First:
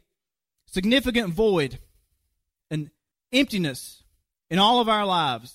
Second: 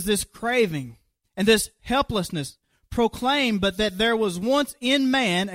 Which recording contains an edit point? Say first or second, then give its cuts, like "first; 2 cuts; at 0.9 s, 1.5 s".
first; 1 cut; at 3.1 s